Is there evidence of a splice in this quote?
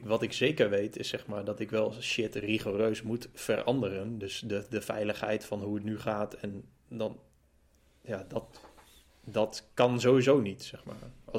no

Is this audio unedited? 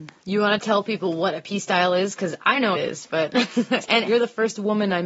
no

